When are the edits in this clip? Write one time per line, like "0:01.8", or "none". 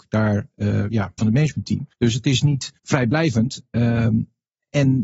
0:01.2
0:01.9
0:02.8